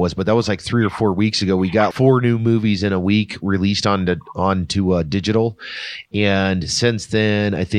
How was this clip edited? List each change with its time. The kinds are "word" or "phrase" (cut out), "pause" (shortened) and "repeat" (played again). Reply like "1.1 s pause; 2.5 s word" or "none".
1.9 s word